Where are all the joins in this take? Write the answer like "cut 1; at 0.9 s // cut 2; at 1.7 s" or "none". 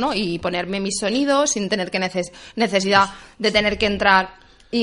none

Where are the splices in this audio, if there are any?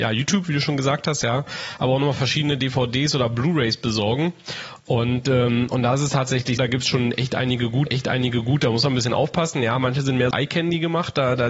cut 1; at 6.6 s // cut 2; at 7.9 s // cut 3; at 10.3 s

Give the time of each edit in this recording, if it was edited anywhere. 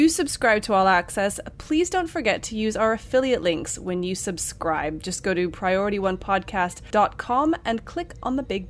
none

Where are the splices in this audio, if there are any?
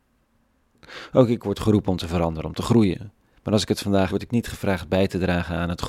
cut 1; at 4.1 s

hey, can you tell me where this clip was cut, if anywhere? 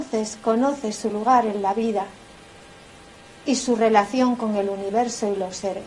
none

